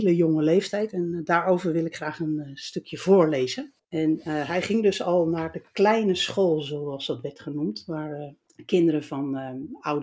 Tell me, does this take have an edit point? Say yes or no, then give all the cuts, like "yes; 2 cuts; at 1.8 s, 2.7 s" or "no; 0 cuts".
yes; 1 cut; at 3.8 s